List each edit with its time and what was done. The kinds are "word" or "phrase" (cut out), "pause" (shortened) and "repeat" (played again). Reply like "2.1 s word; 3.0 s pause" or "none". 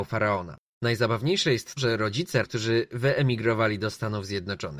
1.8 s word; 2.4 s phrase

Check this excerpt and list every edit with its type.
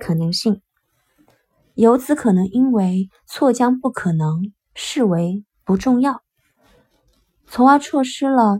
none

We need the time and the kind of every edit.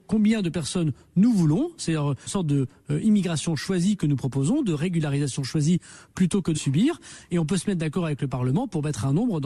2.3 s word; 6.5 s word

